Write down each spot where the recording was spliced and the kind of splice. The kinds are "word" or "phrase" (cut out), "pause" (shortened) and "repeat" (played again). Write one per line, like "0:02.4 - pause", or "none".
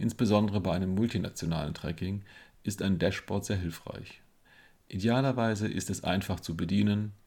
none